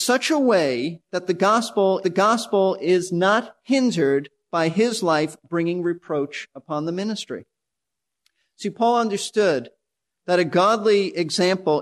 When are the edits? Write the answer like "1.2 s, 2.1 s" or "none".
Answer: 2.0 s